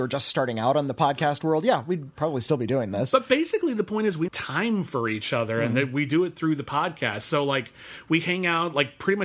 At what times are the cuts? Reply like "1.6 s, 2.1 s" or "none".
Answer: 4.3 s